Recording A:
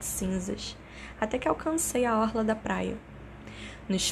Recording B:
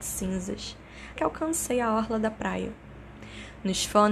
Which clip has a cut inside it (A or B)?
B